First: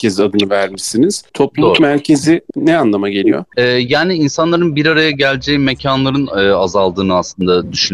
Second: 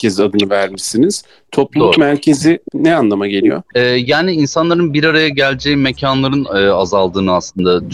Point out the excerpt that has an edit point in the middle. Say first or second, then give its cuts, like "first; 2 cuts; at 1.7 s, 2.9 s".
first; 1 cut; at 1.3 s